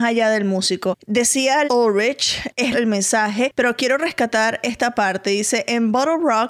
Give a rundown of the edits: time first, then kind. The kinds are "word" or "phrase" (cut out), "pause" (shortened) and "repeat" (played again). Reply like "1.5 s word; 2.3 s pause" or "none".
1.6 s word; 2.7 s word